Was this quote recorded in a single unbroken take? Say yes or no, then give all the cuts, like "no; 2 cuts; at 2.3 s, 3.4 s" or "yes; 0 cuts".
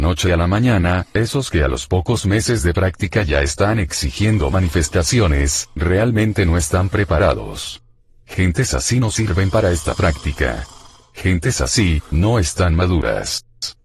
yes; 0 cuts